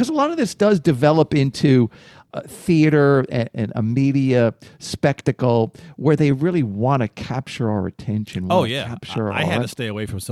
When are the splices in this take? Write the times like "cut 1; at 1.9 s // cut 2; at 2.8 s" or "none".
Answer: none